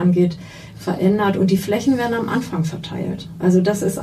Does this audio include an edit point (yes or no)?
no